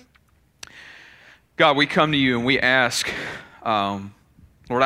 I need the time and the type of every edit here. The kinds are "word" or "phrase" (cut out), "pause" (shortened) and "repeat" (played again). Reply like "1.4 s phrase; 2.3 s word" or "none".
none

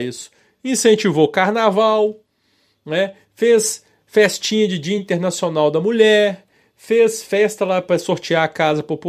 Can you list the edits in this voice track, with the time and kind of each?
none

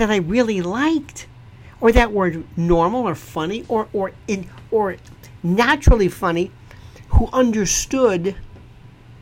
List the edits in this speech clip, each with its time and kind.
4.7 s word

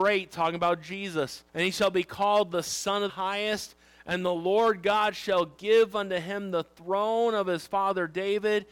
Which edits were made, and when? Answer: 1.5 s pause; 3.1 s word

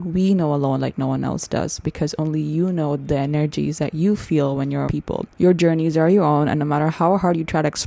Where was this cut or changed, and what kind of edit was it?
4.9 s word; 5.3 s pause

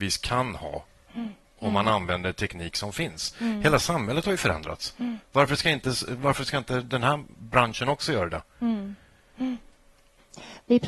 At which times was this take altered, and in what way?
1.5 s pause

